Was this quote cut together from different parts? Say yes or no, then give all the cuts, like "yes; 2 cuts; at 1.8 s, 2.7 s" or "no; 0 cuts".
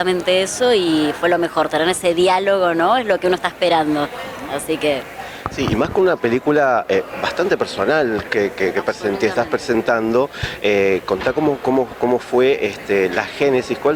no; 0 cuts